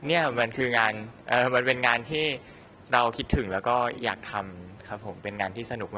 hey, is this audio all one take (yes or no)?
yes